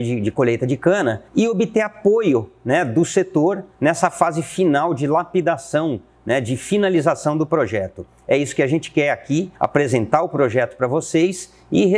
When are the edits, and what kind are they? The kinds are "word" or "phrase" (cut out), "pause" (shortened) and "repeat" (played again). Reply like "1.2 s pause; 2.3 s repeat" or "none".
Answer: 1.3 s pause; 3.7 s pause; 9.5 s pause